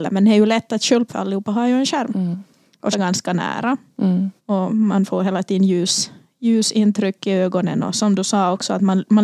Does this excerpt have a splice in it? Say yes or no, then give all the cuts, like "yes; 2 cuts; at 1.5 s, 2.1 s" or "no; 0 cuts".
yes; 3 cuts; at 1.1 s, 2.9 s, 4.4 s